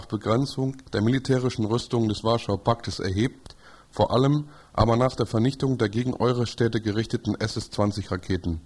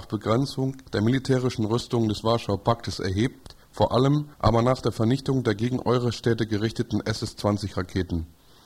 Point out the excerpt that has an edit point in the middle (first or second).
second